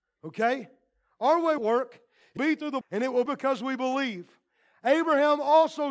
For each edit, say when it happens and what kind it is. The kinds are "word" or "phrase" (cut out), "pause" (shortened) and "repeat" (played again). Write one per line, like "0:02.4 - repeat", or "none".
0:01.6 - word
0:02.4 - word
0:02.8 - word
0:03.3 - word